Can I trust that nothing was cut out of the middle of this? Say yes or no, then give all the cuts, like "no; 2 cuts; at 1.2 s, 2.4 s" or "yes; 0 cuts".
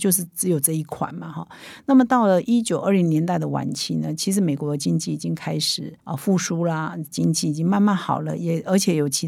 no; 1 cut; at 6.0 s